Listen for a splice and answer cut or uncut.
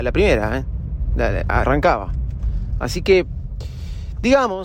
cut